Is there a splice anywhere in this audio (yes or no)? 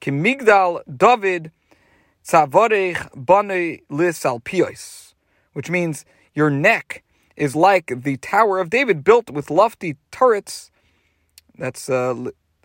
no